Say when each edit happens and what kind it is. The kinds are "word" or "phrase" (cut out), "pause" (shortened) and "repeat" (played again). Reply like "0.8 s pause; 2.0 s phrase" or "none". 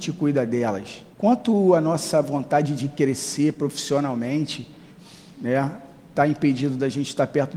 1.1 s pause

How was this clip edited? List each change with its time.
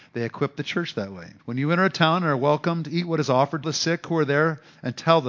1.4 s pause; 3.6 s phrase

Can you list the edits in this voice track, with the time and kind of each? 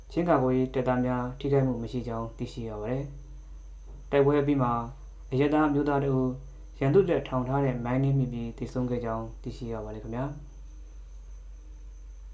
none

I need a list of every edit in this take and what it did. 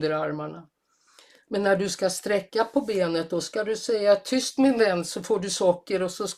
none

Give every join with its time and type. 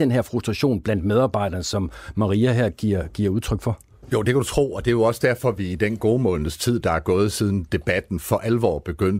none

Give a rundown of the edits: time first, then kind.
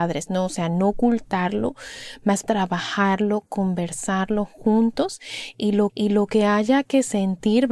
2.4 s word; 5.9 s repeat

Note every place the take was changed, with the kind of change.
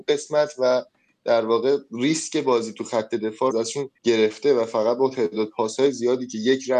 3.5 s word; 4.0 s pause

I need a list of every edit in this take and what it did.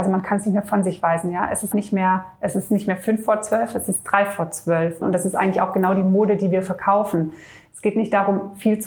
1.7 s word

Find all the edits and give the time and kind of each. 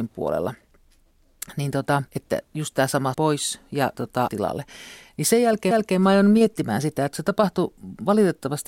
2.1 s pause; 3.1 s word; 3.9 s word; 4.3 s phrase; 5.7 s repeat

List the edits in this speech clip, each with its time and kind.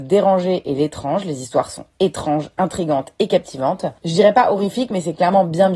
4.0 s pause

